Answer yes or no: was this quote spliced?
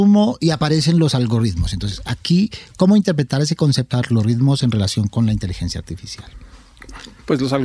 yes